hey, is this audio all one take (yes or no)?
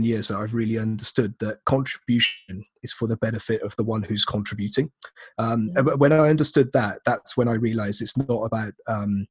yes